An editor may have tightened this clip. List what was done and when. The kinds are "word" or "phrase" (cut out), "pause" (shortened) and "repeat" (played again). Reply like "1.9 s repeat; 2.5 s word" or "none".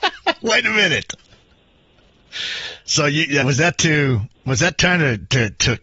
3.4 s word; 4.3 s pause

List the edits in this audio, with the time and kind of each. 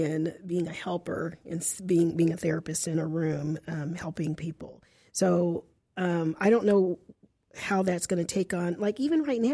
none

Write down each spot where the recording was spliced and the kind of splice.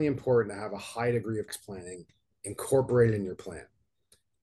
1.5 s word

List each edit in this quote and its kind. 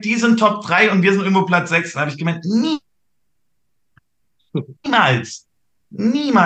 4.8 s pause

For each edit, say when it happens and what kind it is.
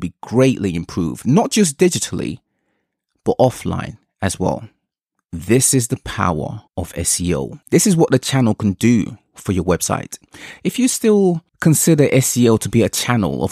6.7 s pause; 7.6 s pause; 11.5 s pause

